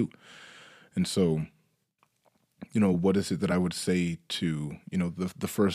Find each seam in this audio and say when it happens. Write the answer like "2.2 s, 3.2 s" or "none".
none